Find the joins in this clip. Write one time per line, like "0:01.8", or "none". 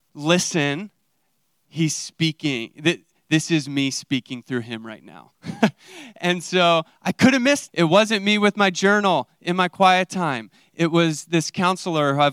0:07.7